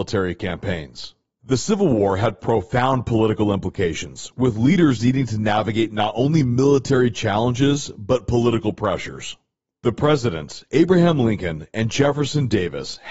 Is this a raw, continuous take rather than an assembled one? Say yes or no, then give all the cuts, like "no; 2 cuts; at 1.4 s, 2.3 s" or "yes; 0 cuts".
yes; 0 cuts